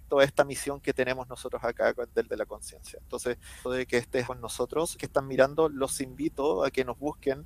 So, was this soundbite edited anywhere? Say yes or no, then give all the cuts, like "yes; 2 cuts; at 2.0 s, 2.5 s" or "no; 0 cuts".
yes; 4 cuts; at 2.3 s, 3.6 s, 4.2 s, 5.0 s